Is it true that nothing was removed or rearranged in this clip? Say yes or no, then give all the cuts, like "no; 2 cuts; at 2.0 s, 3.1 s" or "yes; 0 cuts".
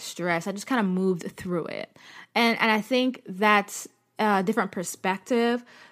yes; 0 cuts